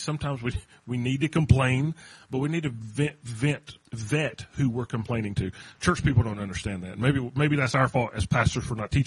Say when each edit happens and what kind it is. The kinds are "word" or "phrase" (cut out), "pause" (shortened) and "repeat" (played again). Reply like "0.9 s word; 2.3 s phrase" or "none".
3.9 s pause